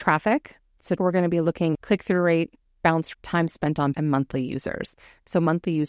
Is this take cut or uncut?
cut